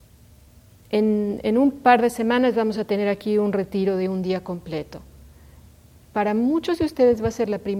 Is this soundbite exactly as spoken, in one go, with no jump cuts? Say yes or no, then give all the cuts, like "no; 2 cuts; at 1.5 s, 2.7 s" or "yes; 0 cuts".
yes; 0 cuts